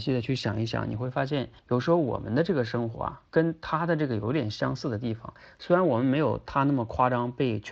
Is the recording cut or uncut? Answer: cut